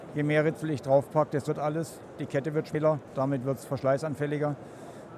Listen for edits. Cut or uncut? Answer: cut